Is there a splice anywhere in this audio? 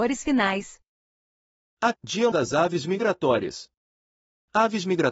yes; 2 cuts; at 1.9 s, 2.3 s

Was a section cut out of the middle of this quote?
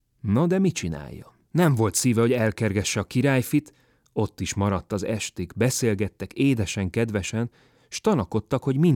yes; 1 cut; at 1.4 s

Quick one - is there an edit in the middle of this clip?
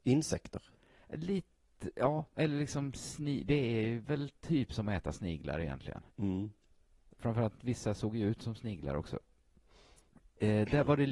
yes; 1 cut; at 6.1 s

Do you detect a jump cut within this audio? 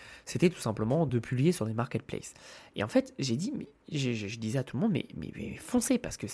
no; 0 cuts

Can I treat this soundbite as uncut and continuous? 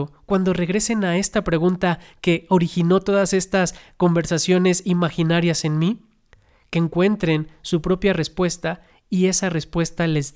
yes; 0 cuts

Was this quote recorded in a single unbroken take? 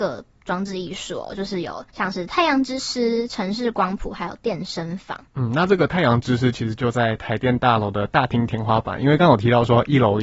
no; 2 cuts; at 1.9 s, 5.3 s

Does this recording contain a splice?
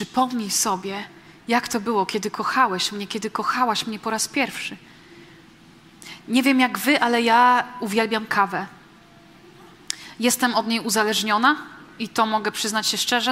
no; 0 cuts

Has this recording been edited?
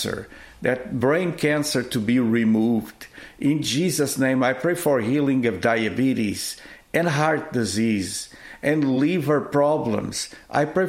no; 0 cuts

